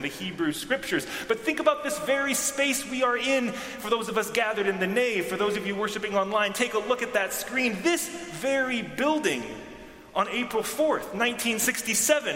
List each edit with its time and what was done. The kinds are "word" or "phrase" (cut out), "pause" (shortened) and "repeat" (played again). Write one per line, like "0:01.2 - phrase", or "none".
none